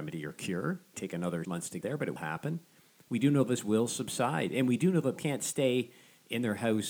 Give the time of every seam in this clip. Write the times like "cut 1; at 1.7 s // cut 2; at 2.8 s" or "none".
cut 1; at 0.9 s // cut 2; at 1.4 s // cut 3; at 1.8 s // cut 4; at 2.2 s // cut 5; at 5.2 s